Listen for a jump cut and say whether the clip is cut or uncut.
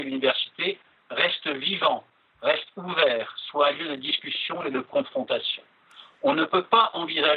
uncut